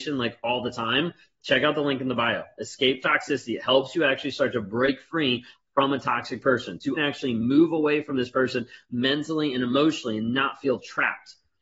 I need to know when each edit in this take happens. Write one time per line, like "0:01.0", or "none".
0:07.0